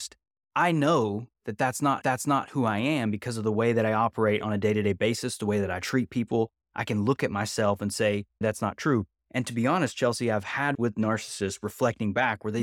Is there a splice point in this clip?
yes; 3 cuts; at 2.0 s, 8.4 s, 10.7 s

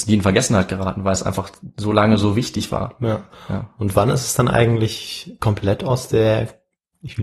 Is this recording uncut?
yes; 0 cuts

